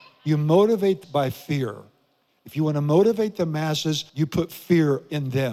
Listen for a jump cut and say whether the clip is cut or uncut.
cut